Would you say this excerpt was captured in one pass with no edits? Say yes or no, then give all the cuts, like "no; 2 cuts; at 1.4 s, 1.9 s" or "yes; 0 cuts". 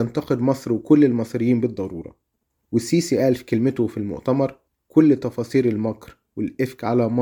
no; 2 cuts; at 2.5 s, 4.7 s